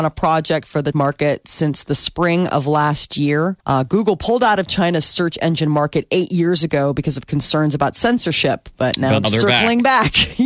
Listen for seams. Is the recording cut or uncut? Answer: cut